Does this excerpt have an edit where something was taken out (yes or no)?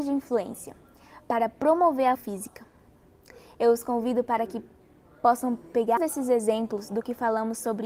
yes